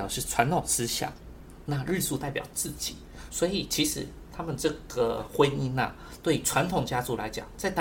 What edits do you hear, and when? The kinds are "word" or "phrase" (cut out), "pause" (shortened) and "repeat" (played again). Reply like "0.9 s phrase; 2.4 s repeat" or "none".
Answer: none